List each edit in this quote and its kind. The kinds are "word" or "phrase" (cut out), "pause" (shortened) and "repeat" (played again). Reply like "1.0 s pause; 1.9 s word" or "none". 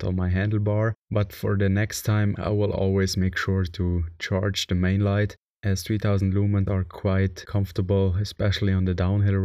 1.0 s pause